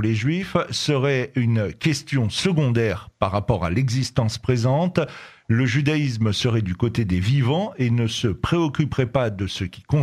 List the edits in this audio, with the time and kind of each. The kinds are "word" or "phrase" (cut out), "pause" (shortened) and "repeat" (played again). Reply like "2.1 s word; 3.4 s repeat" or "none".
none

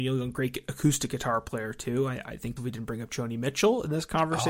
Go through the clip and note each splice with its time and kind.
2.6 s phrase

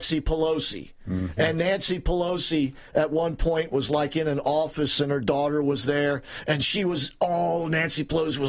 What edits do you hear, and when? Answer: none

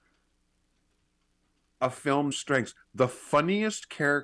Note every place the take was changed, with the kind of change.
2.3 s phrase

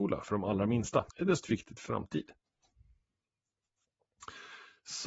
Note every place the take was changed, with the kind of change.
1.1 s pause; 1.4 s phrase; 1.9 s word

